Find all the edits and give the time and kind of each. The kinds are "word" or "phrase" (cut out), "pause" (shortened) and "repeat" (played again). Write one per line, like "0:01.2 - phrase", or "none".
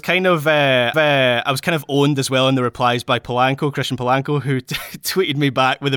0:00.9 - repeat